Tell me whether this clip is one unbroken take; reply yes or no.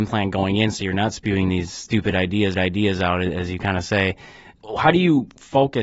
no